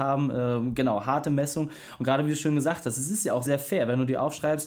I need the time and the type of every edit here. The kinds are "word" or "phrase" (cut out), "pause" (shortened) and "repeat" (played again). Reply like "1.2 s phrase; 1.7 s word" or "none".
3.5 s word